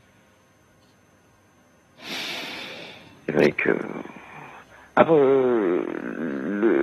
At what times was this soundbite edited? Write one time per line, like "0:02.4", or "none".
0:05.1